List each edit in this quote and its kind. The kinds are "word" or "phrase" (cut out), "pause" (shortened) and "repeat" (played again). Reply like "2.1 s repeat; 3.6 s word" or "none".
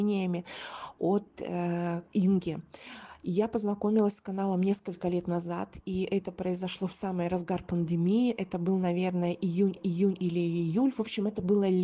2.1 s word; 9.8 s repeat